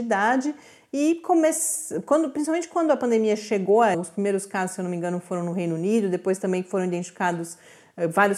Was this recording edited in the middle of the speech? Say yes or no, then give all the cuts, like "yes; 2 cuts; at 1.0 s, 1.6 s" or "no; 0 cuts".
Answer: yes; 1 cut; at 3.9 s